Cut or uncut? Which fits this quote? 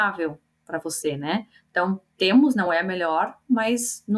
uncut